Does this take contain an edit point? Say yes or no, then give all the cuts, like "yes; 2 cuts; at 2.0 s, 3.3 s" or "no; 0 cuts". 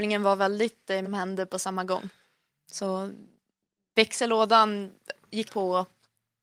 yes; 2 cuts; at 1.0 s, 5.5 s